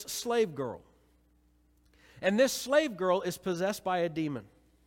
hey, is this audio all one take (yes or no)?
yes